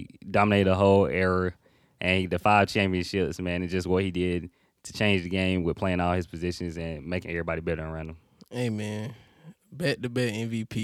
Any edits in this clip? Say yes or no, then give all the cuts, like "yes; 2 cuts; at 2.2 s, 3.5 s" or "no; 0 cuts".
no; 0 cuts